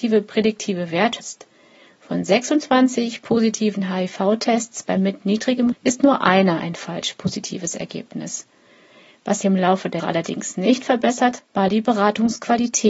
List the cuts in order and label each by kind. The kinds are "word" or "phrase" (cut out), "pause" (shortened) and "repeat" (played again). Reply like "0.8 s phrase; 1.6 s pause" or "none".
1.2 s word; 5.0 s word; 5.7 s word; 9.4 s word; 10.0 s word; 11.4 s word